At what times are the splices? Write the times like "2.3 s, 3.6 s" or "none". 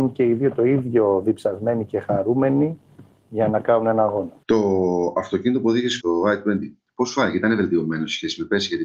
6.0 s